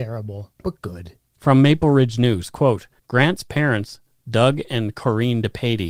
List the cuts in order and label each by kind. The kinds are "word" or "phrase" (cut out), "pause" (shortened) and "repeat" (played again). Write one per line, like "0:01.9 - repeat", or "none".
0:03.0 - pause